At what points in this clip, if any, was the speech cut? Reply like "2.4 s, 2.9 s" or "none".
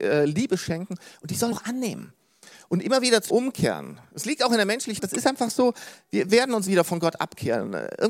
1.5 s, 3.3 s, 5.0 s, 6.3 s, 6.7 s